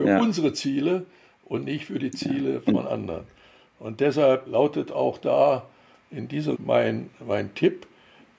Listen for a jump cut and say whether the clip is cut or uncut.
cut